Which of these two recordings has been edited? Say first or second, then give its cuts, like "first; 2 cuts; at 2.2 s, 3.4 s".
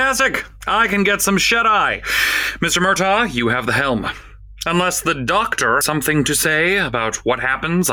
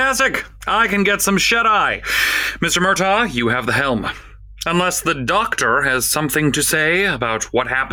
first; 1 cut; at 5.8 s